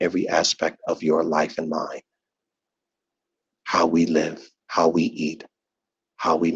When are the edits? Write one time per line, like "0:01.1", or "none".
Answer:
none

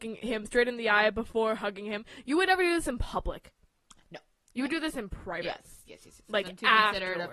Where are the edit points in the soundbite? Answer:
none

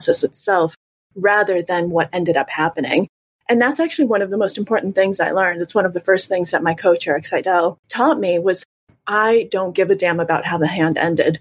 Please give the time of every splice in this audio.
0:07.8

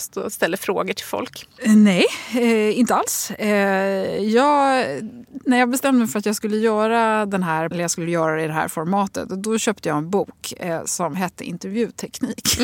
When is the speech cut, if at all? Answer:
0:07.7

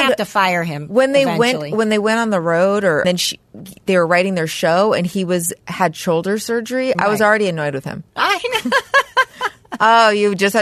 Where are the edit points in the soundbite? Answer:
0:03.0

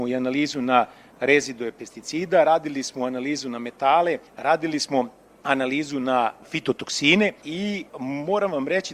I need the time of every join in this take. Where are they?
0:04.3
0:07.9

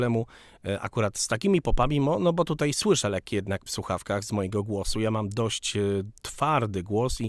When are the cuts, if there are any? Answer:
0:03.7

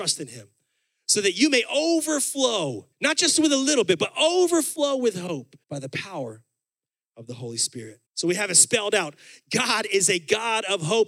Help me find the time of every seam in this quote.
0:02.9
0:05.6
0:08.1

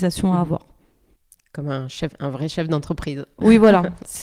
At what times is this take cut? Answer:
none

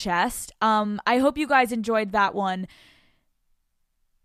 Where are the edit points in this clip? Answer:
none

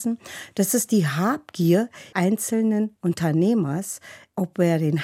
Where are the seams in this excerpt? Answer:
0:02.1

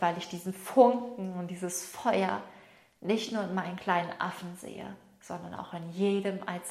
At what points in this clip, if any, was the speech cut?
none

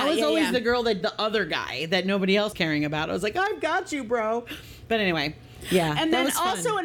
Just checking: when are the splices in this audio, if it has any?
0:01.0
0:02.5

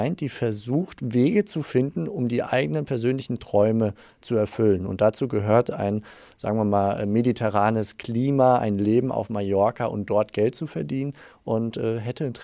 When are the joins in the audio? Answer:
none

